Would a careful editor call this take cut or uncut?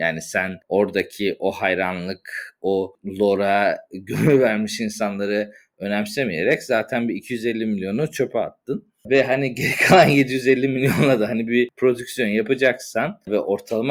uncut